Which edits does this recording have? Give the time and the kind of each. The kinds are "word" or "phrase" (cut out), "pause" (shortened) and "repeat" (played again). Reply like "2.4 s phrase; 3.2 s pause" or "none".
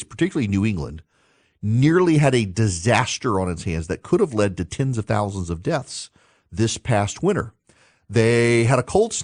none